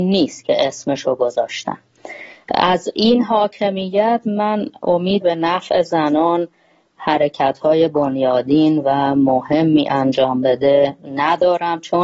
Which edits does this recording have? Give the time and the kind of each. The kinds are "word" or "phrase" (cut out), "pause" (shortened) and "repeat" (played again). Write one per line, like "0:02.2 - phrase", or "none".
0:05.2 - word